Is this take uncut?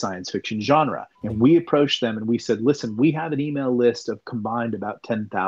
no; 1 cut; at 1.2 s

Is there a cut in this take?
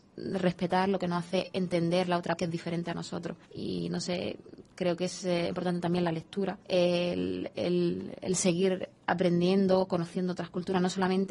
yes; 4 cuts; at 2.4 s, 3.4 s, 5.5 s, 6.6 s

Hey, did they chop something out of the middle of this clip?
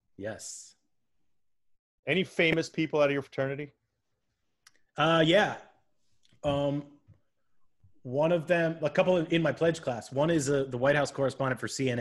no; 0 cuts

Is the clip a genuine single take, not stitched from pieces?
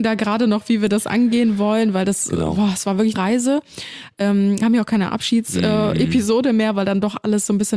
no; 2 cuts; at 3.1 s, 4.6 s

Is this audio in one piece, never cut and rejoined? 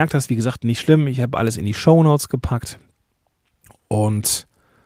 yes; 0 cuts

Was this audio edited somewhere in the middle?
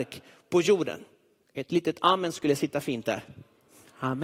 yes; 1 cut; at 1.4 s

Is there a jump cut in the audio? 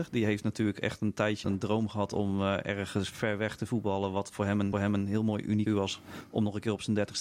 yes; 3 cuts; at 1.4 s, 4.7 s, 5.7 s

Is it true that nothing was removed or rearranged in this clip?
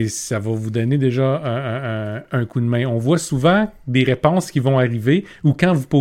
no; 1 cut; at 2.3 s

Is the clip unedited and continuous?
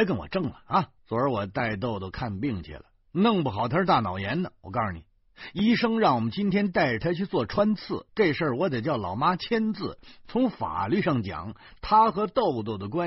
no; 2 cuts; at 1.0 s, 8.1 s

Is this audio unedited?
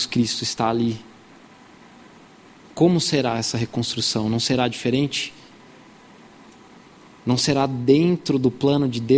yes; 0 cuts

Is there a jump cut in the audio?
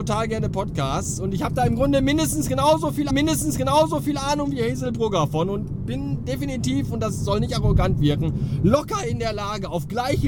yes; 1 cut; at 3.1 s

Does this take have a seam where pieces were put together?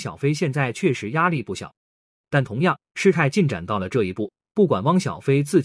yes; 1 cut; at 1.9 s

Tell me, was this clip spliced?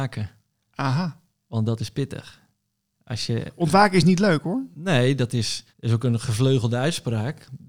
yes; 1 cut; at 5.7 s

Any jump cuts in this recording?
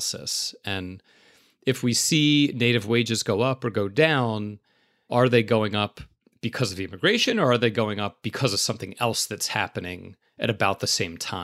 no; 0 cuts

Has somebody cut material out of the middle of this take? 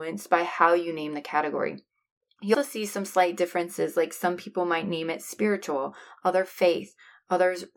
yes; 1 cut; at 2.5 s

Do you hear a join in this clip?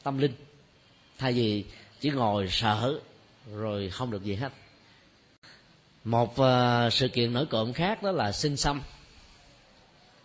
no; 0 cuts

